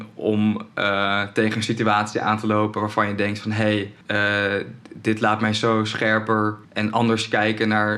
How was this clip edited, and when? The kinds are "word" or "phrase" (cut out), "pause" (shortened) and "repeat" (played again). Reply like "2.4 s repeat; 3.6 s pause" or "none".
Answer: 4.0 s pause; 6.6 s pause